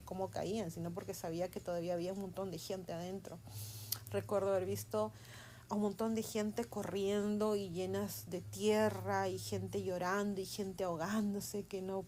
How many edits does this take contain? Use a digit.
0